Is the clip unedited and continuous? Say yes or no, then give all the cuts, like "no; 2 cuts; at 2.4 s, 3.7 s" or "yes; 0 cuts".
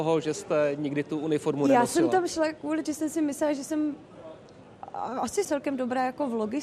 no; 2 cuts; at 2.8 s, 5.4 s